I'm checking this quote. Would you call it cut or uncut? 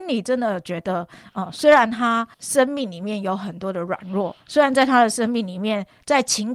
cut